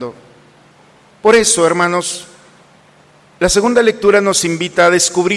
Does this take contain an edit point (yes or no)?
no